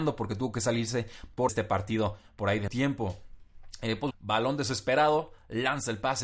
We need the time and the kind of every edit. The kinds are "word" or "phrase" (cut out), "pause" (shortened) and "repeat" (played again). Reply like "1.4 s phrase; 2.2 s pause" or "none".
1.5 s phrase; 2.7 s word; 4.1 s word